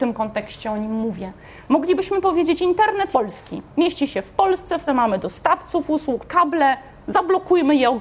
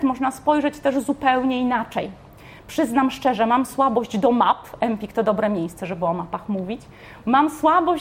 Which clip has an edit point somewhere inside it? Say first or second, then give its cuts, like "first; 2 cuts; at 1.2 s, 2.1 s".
first; 3 cuts; at 3.1 s, 4.9 s, 6.3 s